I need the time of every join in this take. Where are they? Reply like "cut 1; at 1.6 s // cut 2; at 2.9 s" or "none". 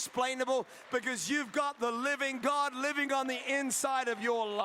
none